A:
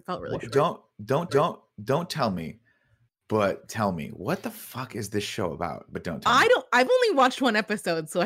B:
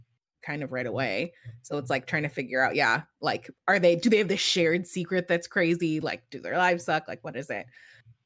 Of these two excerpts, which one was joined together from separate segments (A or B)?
A